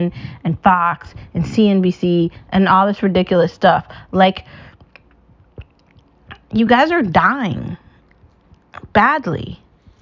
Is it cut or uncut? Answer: uncut